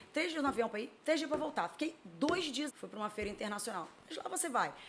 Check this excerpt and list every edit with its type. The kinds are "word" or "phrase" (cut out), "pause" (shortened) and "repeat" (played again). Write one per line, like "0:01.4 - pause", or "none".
0:01.0 - pause
0:02.7 - phrase